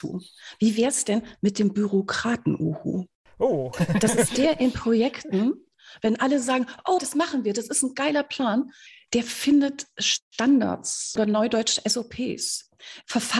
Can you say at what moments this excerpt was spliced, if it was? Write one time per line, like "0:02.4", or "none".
0:07.0

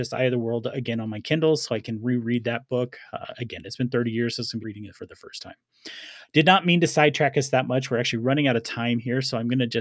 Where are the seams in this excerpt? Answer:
0:04.6

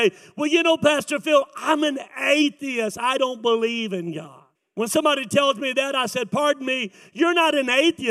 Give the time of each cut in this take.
0:04.5

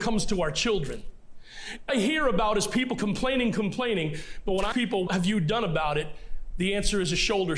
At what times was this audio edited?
0:01.9
0:03.0
0:04.7
0:05.1

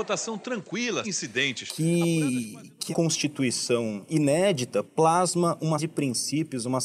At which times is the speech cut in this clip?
0:01.0
0:02.9
0:04.8
0:05.8

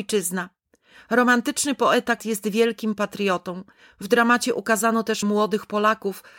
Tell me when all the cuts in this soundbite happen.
0:02.2
0:05.2

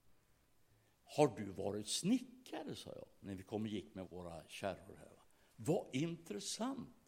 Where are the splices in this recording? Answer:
0:04.1

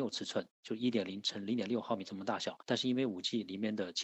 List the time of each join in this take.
0:02.6

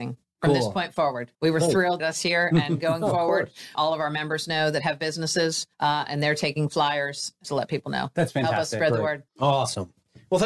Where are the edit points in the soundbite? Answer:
0:01.3
0:02.0
0:03.7
0:05.7
0:07.4
0:09.3

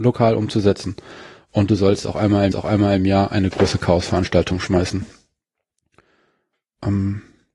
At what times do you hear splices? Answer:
0:02.5

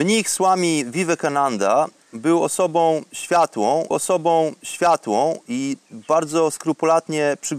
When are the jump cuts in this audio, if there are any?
0:03.9

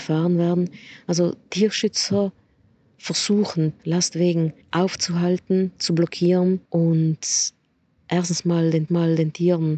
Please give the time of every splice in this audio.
0:01.4
0:03.8
0:04.6
0:06.6
0:08.9

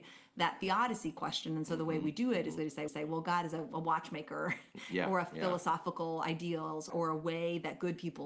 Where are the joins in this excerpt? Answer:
0:02.6
0:02.9
0:06.9

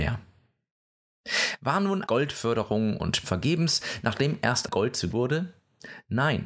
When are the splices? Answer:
0:02.1
0:03.2
0:04.7
0:05.1

